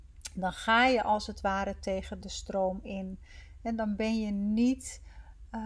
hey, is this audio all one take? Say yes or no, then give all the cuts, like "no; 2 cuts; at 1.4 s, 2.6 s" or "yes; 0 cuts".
yes; 0 cuts